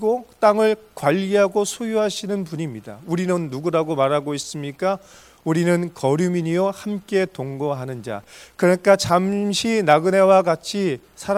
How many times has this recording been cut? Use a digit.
0